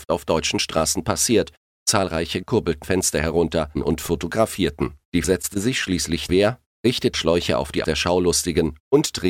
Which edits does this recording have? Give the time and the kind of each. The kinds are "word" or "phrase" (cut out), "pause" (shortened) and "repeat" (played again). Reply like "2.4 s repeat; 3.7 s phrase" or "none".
2.4 s word; 2.8 s word; 3.7 s word; 5.2 s word; 6.3 s word; 7.1 s word; 7.8 s word